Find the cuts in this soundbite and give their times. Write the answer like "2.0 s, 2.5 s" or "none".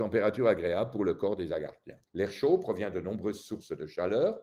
2.1 s